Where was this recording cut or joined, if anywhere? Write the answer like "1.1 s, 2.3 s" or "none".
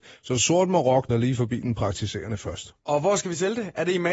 1.1 s